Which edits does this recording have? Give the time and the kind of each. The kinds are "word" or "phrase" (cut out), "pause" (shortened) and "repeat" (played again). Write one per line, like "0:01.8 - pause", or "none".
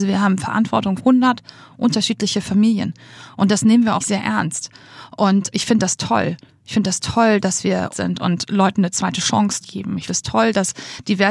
0:01.0 - word
0:04.0 - word
0:05.5 - word
0:07.9 - word
0:09.6 - word
0:10.1 - word